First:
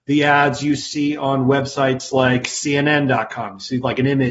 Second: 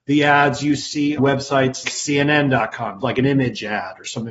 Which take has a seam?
second; 3 cuts; at 1.2 s, 1.8 s, 3.0 s

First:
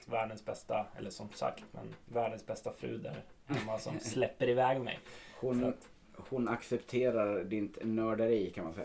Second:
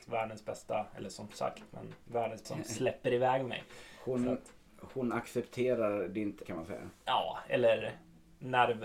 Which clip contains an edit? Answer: second; 2 cuts; at 2.4 s, 6.4 s

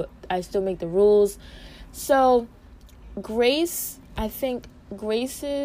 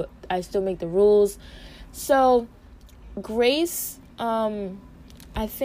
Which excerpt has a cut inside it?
first; 1 cut; at 4.1 s

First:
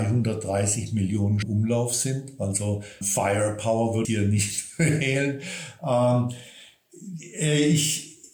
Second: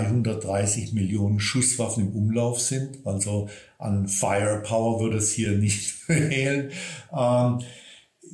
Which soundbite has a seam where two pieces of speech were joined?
first; 3 cuts; at 1.4 s, 3.0 s, 4.0 s

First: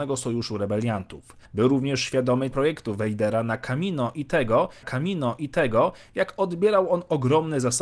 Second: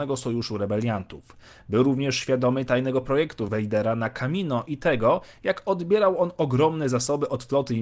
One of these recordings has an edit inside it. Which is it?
first; 3 cuts; at 1.5 s, 2.5 s, 4.8 s

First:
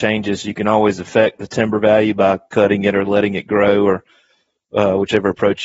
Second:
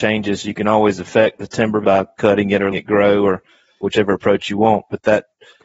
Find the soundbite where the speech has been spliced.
second; 3 cuts; at 1.8 s, 2.7 s, 3.8 s

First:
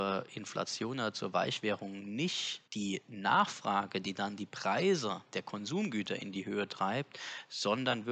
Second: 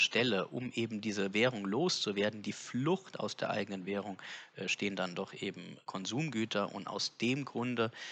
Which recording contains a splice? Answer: first; 1 cut; at 2.7 s

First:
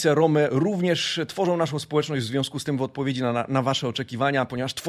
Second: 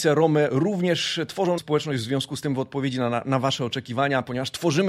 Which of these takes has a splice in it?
second; 1 cut; at 1.6 s

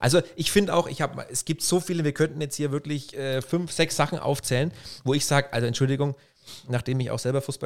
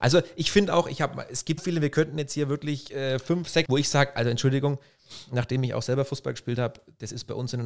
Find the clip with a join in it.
second; 2 cuts; at 1.6 s, 3.7 s

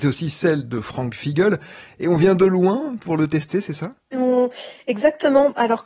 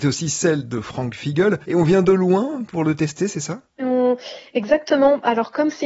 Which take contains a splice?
second; 1 cut; at 1.6 s

